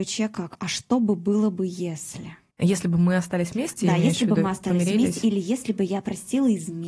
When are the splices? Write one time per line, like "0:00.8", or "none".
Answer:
0:02.5